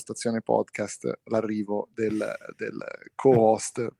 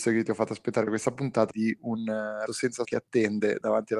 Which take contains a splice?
second; 3 cuts; at 1.5 s, 2.5 s, 2.8 s

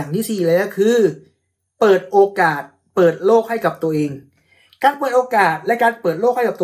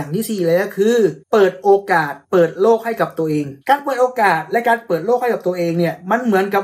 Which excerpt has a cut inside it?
second; 3 cuts; at 1.2 s, 2.2 s, 3.6 s

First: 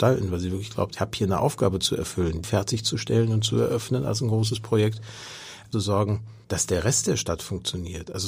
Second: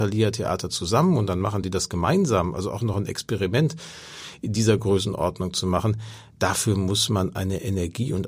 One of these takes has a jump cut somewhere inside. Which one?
first; 4 cuts; at 1.0 s, 2.4 s, 5.7 s, 6.4 s

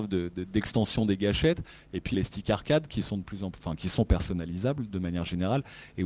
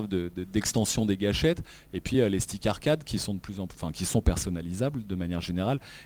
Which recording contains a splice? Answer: first; 1 cut; at 2.1 s

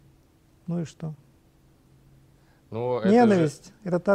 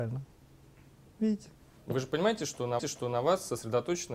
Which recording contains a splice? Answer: second; 1 cut; at 2.8 s

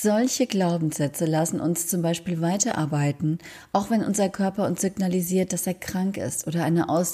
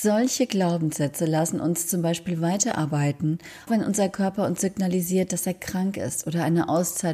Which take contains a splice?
second; 1 cut; at 3.7 s

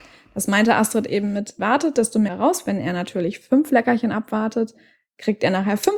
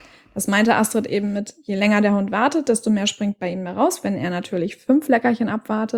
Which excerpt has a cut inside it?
first; 2 cuts; at 1.6 s, 2.3 s

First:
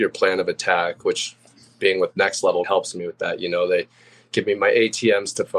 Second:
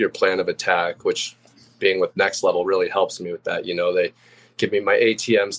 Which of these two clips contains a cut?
first; 1 cut; at 2.6 s

